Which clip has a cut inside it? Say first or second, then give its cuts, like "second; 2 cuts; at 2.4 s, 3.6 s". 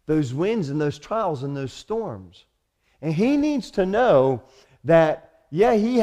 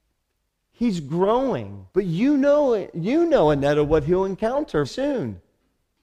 second; 2 cuts; at 1.9 s, 4.8 s